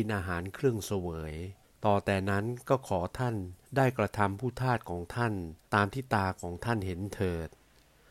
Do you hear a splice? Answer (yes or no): yes